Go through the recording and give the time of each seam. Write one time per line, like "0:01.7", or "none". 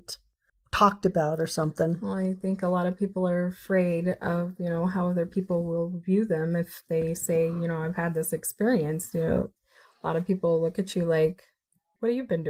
none